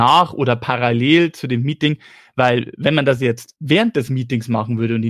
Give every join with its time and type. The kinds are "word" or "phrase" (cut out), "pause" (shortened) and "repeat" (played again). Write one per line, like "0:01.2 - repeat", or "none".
none